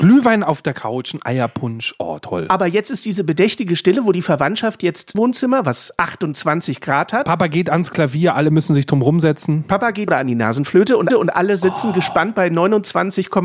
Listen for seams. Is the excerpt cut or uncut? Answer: cut